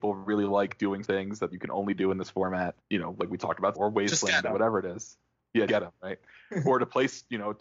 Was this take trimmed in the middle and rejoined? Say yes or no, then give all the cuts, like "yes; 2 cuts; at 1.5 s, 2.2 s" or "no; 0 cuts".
yes; 4 cuts; at 1.0 s, 2.8 s, 3.7 s, 5.7 s